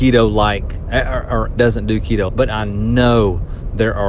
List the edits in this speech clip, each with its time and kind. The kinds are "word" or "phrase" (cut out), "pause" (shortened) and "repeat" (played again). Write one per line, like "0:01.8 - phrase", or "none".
0:01.6 - word
0:02.3 - phrase